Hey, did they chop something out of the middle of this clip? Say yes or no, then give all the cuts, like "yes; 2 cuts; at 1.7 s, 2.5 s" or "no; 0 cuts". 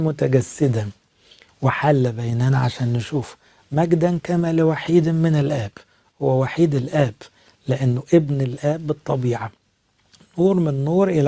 no; 0 cuts